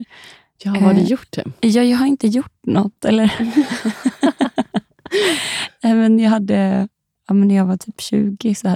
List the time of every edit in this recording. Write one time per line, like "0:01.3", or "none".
none